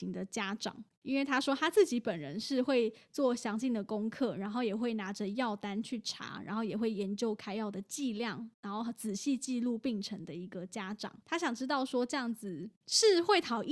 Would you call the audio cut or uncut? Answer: cut